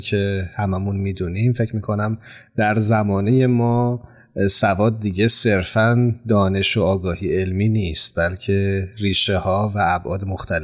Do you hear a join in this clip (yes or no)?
no